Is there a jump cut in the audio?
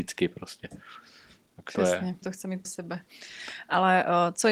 yes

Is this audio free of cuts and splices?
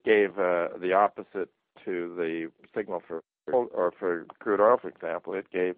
yes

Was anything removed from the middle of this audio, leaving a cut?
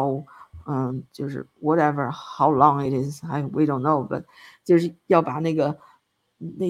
no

